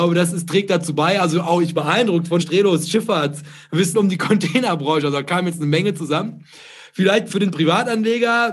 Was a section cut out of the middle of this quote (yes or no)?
yes